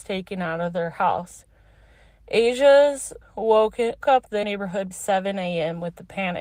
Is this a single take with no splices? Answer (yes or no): no